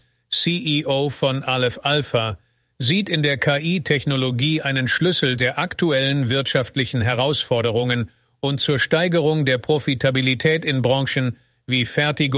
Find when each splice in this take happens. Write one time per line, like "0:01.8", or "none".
0:05.4